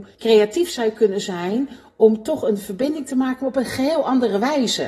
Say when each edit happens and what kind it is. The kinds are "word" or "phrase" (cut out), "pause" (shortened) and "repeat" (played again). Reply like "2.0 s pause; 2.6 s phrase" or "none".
none